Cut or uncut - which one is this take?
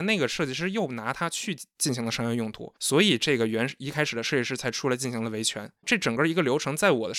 cut